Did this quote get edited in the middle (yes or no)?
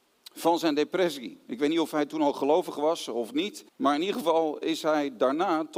yes